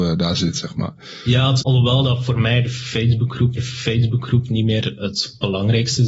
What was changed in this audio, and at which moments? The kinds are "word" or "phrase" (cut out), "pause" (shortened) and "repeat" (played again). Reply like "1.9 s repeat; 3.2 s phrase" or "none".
1.6 s word; 3.6 s repeat

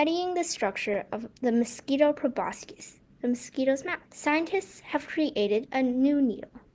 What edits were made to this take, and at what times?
4.1 s pause

